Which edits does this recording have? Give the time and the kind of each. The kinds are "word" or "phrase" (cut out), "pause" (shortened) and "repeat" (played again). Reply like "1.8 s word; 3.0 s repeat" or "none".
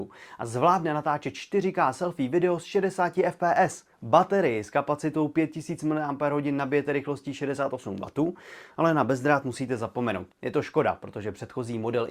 3.9 s pause; 10.3 s pause

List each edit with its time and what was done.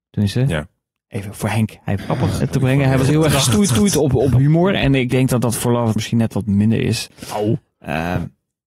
2.0 s phrase; 2.4 s word; 3.7 s repeat; 5.1 s word; 6.0 s phrase

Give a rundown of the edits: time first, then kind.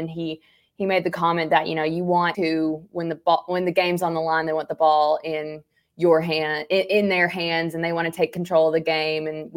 2.3 s word

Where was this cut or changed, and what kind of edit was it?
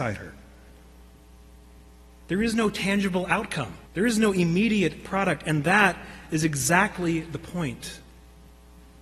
3.9 s pause

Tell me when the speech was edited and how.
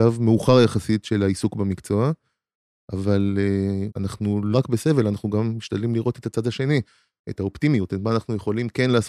3.9 s word; 4.5 s word

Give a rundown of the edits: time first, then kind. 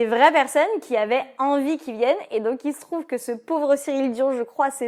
none

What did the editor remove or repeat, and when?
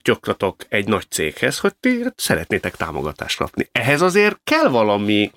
none

